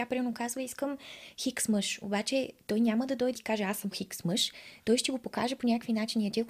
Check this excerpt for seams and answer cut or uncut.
cut